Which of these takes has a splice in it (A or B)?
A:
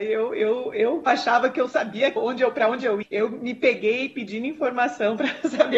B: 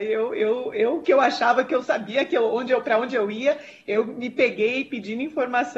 A